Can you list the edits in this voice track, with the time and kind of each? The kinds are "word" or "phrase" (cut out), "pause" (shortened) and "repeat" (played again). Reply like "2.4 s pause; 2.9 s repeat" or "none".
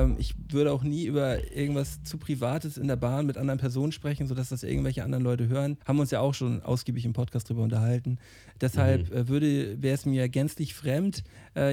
5.8 s pause

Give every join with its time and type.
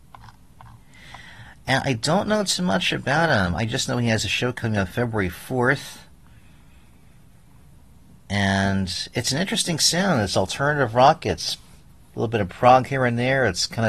none

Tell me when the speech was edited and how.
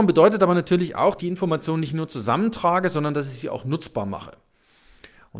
1.2 s phrase

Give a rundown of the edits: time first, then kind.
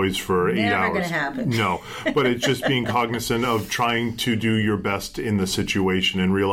none

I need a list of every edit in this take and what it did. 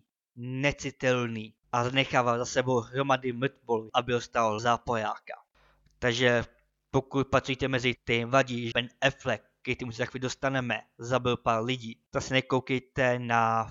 1.6 s pause; 3.9 s word; 4.6 s word; 8.0 s word; 8.7 s word; 12.1 s pause

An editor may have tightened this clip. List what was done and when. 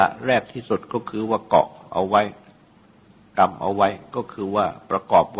none

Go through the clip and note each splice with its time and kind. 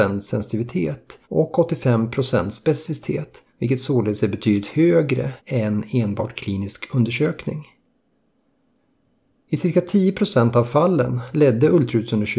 1.2 s pause; 3.5 s pause; 5.4 s pause

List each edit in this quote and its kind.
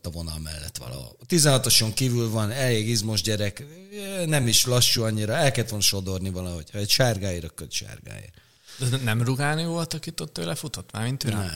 none

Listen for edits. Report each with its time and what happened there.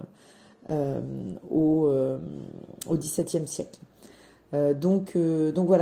none

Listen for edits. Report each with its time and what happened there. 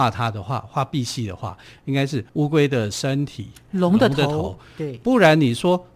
2.3 s pause

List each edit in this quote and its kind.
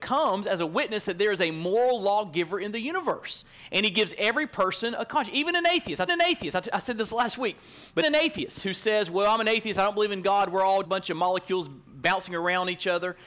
6.1 s repeat; 8.0 s word; 10.8 s word

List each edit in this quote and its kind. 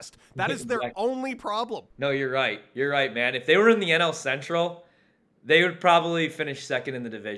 1.9 s pause

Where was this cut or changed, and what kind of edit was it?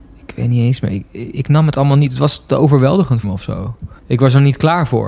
3.2 s word; 4.0 s pause

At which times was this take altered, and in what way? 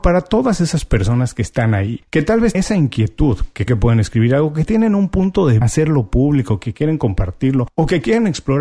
2.5 s word; 3.7 s word; 5.6 s phrase

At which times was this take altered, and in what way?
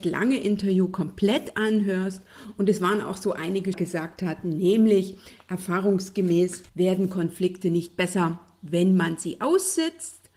3.7 s phrase; 6.7 s pause

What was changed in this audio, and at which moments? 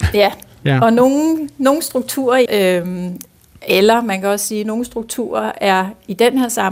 2.5 s phrase

